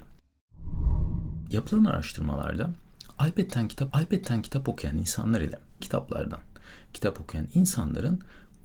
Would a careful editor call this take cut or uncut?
cut